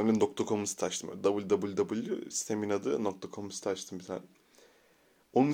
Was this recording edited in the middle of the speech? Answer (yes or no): no